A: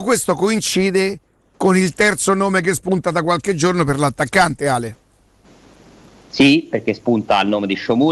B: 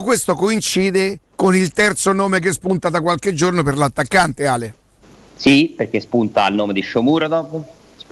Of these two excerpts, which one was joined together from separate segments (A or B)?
B